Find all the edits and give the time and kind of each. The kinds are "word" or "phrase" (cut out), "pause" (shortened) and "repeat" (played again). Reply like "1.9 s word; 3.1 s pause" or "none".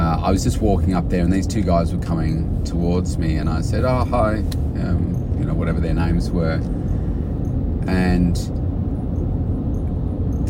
none